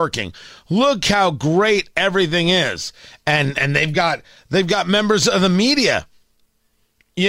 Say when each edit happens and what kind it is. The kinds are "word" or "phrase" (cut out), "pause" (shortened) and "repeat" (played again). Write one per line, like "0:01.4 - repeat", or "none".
none